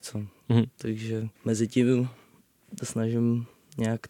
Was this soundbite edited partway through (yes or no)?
yes